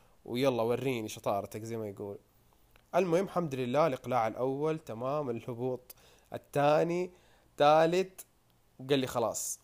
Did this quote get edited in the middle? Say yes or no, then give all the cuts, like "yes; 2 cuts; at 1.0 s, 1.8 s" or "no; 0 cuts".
no; 0 cuts